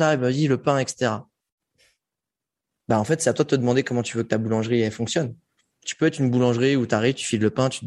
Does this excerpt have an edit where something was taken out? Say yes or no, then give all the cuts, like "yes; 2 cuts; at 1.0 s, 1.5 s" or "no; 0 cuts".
no; 0 cuts